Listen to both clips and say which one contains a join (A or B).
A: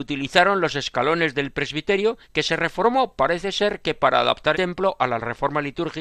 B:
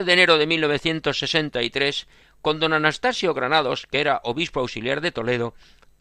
A